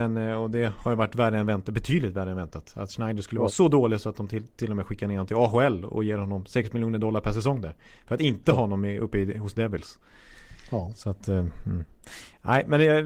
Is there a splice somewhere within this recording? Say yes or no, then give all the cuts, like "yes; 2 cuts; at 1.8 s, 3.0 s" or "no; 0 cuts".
no; 0 cuts